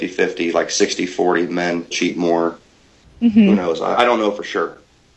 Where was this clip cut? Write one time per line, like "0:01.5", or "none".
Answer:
0:01.9
0:04.0